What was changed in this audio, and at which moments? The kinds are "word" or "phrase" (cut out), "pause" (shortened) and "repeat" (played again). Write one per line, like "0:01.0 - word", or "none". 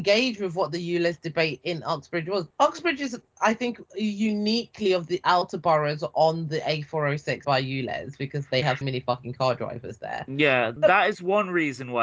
0:07.4 - word
0:08.8 - word